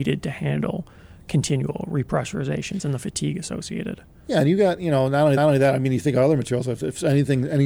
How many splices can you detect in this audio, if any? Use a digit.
1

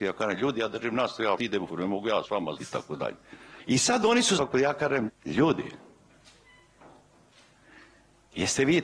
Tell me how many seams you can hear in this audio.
6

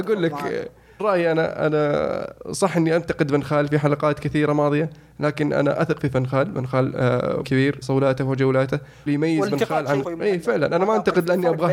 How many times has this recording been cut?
5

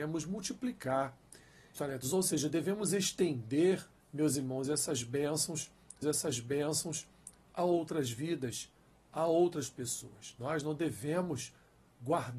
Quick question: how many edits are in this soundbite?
3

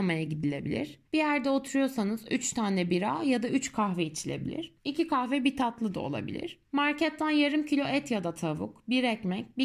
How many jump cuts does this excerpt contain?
3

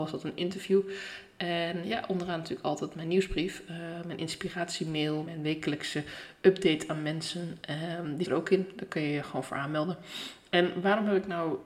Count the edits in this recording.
2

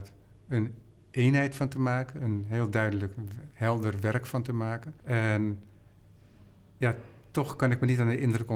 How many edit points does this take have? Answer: 2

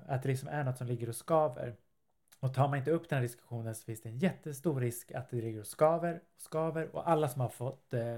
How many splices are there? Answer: 0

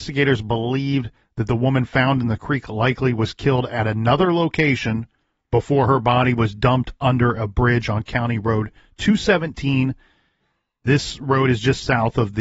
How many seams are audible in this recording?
0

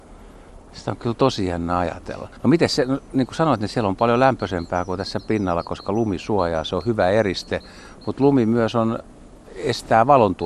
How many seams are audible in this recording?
1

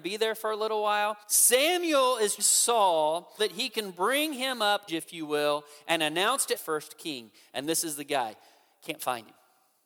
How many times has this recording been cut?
5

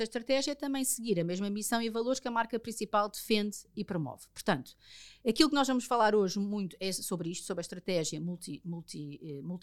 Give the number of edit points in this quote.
0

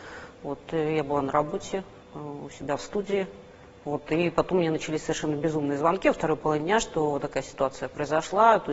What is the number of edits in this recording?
0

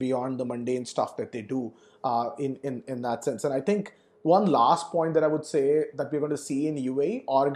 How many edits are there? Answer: 0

